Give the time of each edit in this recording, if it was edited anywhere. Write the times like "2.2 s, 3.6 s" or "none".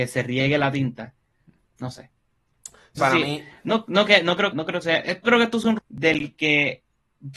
1.6 s, 3.0 s, 4.1 s, 4.5 s, 4.8 s, 5.2 s, 5.8 s